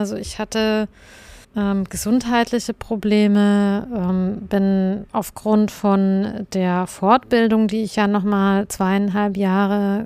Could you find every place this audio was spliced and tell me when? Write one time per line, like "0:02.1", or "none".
0:01.4
0:05.1